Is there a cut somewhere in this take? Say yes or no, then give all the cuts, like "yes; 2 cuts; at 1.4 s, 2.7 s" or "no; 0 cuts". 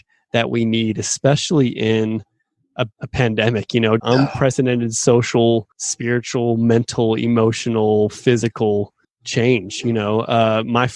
yes; 4 cuts; at 2.9 s, 4.0 s, 5.7 s, 9.0 s